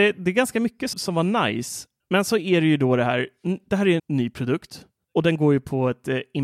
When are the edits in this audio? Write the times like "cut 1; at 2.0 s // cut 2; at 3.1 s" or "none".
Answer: cut 1; at 0.9 s // cut 2; at 2.0 s // cut 3; at 4.0 s